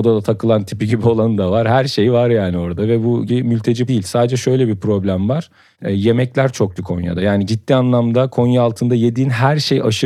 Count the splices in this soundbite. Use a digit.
4